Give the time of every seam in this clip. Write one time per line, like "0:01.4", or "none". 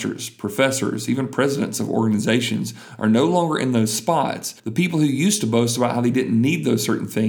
0:04.6